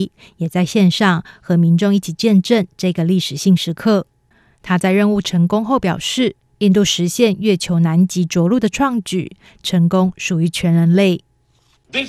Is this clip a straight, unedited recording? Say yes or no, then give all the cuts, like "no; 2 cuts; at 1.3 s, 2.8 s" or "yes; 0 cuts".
yes; 0 cuts